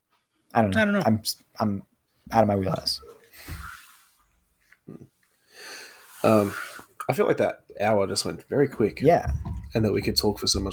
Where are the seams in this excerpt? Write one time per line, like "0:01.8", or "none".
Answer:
none